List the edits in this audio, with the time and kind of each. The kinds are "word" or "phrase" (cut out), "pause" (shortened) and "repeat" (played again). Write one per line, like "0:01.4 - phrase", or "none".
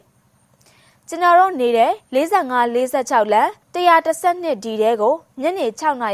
0:02.0 - pause
0:03.6 - pause